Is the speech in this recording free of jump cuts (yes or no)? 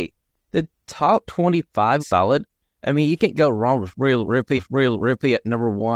no